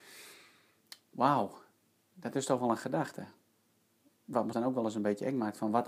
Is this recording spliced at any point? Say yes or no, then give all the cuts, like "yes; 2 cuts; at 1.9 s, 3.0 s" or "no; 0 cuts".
yes; 1 cut; at 4.5 s